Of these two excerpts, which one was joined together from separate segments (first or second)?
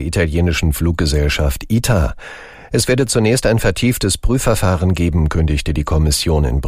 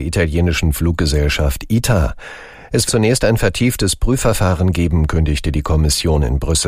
second